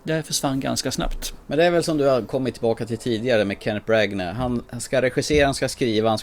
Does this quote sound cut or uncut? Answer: cut